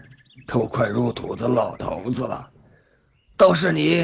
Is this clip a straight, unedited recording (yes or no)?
yes